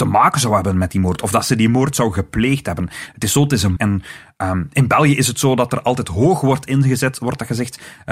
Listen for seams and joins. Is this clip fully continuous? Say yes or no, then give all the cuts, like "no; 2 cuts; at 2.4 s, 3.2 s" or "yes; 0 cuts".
no; 1 cut; at 3.8 s